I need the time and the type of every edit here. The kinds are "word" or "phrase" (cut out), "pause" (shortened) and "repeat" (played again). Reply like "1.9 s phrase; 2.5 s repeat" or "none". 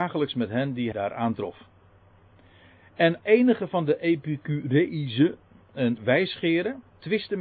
0.9 s word; 3.2 s word; 6.0 s word